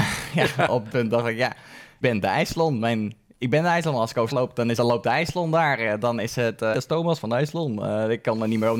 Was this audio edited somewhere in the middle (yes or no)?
yes